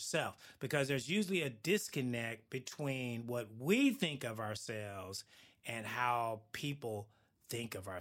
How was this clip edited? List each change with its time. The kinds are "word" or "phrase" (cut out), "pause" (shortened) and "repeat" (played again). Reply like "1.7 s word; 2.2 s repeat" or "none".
none